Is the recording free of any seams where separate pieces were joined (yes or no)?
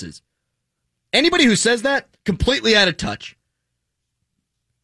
yes